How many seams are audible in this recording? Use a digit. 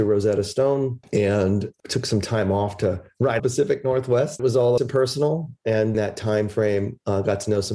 4